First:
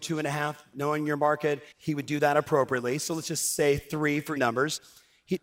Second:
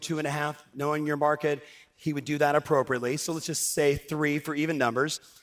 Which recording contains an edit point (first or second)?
first